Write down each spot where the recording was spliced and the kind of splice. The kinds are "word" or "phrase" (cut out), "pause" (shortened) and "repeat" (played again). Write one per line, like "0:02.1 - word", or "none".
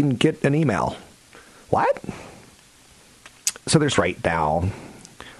0:03.9 - word